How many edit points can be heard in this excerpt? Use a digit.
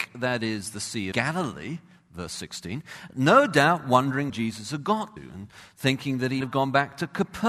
4